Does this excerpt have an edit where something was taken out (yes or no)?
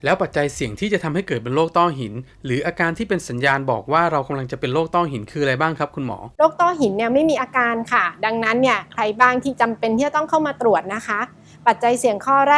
yes